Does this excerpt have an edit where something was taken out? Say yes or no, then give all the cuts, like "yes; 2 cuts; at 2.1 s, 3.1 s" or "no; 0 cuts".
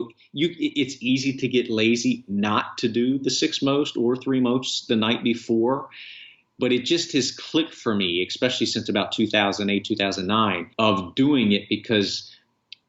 yes; 1 cut; at 10.7 s